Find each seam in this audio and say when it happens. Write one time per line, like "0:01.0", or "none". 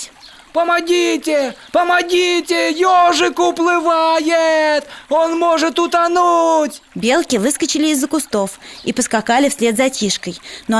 0:06.9